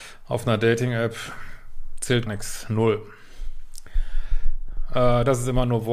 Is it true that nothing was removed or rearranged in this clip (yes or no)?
no